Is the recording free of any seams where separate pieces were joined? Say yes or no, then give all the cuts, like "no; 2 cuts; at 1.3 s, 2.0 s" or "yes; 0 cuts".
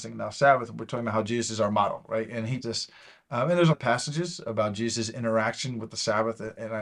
no; 2 cuts; at 2.6 s, 3.7 s